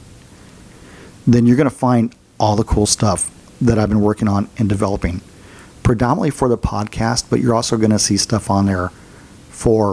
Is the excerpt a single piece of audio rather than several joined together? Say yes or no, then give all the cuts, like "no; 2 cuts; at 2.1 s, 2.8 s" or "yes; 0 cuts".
yes; 0 cuts